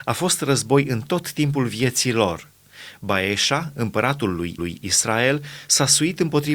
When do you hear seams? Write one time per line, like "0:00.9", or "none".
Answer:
0:04.6

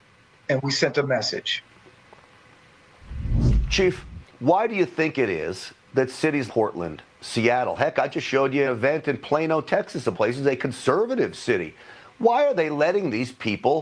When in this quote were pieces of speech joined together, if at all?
0:06.5
0:08.6
0:10.1

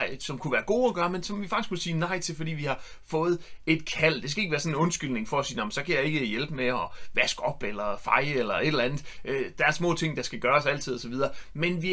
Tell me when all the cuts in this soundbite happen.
none

